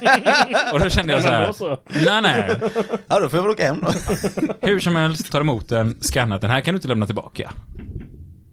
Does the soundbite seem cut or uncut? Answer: cut